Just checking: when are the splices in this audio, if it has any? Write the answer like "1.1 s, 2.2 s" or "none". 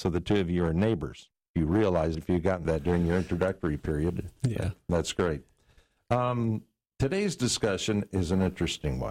2.1 s, 2.6 s, 4.4 s